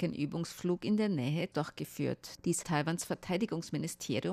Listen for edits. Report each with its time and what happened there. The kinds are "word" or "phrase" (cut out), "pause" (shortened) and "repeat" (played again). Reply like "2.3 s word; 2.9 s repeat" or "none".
1.5 s word; 2.6 s word